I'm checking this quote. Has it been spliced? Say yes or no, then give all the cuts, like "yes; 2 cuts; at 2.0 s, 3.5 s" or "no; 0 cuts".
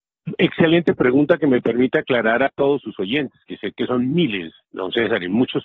no; 0 cuts